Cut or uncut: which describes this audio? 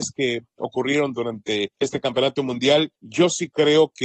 uncut